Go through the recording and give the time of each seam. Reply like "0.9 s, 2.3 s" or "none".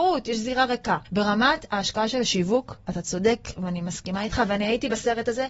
1.1 s